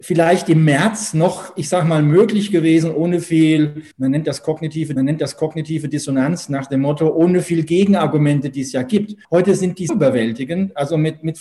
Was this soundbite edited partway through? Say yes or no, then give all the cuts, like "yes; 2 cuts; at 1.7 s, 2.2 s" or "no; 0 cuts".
yes; 4 cuts; at 3.9 s, 5.0 s, 9.2 s, 9.9 s